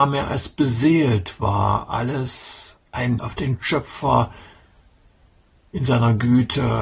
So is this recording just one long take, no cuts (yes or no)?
no